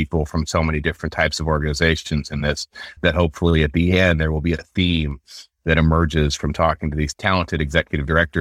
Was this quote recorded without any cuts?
yes; 0 cuts

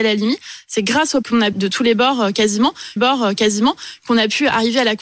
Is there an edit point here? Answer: yes; 3 cuts; at 1.2 s, 1.5 s, 3.0 s

